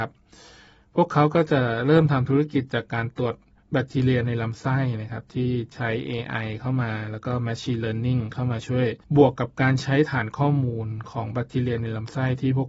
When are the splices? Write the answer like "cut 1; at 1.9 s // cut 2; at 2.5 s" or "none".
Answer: cut 1; at 9.0 s